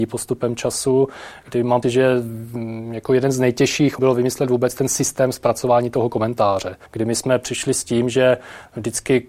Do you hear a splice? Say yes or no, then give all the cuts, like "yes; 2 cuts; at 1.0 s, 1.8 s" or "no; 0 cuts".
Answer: yes; 3 cuts; at 1.8 s, 4.0 s, 6.9 s